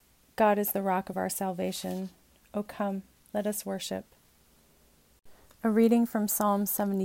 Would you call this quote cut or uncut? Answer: uncut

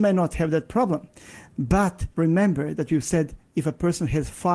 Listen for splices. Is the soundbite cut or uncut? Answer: cut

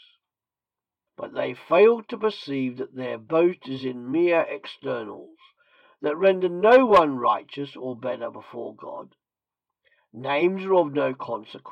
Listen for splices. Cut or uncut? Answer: uncut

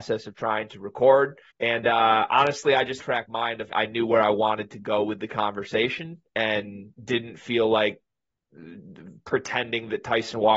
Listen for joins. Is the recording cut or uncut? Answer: cut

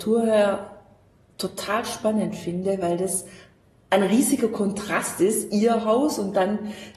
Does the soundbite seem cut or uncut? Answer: uncut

